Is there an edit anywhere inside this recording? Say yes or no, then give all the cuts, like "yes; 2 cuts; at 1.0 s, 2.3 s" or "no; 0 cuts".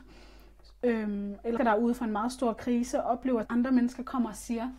yes; 2 cuts; at 1.6 s, 3.4 s